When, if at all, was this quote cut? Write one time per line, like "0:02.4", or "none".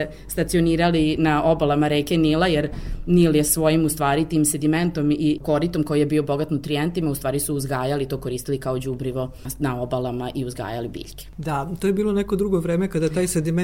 none